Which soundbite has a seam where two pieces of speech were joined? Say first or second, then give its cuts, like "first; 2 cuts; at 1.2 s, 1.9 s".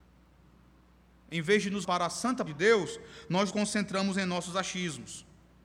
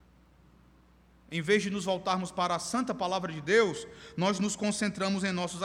first; 3 cuts; at 1.8 s, 2.5 s, 3.5 s